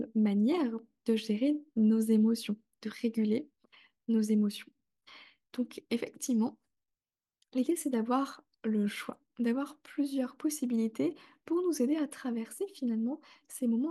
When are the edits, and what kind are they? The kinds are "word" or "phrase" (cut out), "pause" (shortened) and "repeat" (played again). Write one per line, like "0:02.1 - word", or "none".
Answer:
none